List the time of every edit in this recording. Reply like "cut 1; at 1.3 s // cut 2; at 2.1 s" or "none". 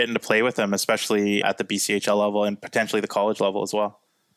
cut 1; at 1.4 s